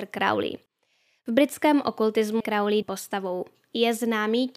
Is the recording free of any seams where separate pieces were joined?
no; 2 cuts; at 2.4 s, 2.8 s

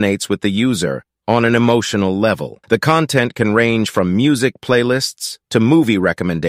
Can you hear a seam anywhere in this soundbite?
yes; 1 cut; at 2.6 s

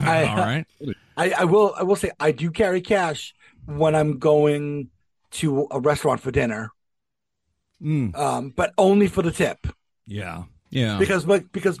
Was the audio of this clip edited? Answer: no; 0 cuts

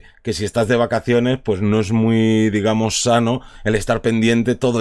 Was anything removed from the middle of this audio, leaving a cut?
no; 0 cuts

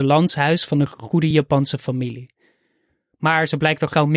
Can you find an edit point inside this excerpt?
no; 0 cuts

